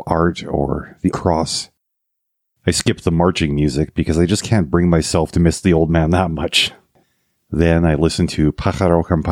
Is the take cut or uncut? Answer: cut